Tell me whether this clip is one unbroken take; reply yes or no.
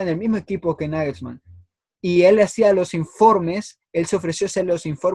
yes